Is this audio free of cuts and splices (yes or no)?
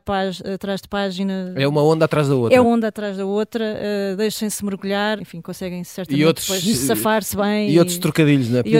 no